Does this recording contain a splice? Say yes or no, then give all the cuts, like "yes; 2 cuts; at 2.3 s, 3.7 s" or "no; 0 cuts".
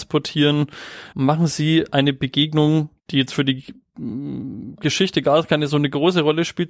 yes; 2 cuts; at 1.1 s, 3.0 s